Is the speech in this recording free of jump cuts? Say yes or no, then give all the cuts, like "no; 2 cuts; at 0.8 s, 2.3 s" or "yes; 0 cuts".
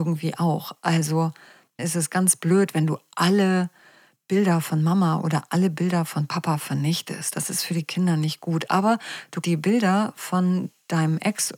no; 2 cuts; at 1.8 s, 9.4 s